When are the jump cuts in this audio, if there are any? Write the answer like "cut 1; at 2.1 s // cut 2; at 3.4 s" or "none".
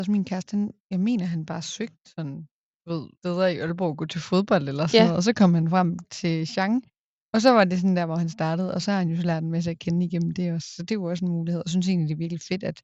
cut 1; at 3.2 s